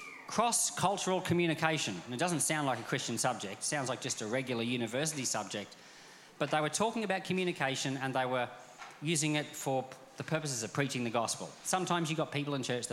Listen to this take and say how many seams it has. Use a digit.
0